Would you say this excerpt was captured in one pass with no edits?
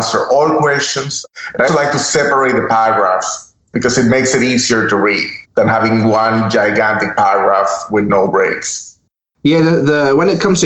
no; 3 cuts; at 1.7 s, 3.7 s, 5.4 s

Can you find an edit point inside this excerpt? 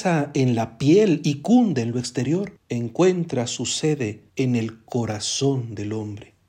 yes; 2 cuts; at 2.6 s, 4.3 s

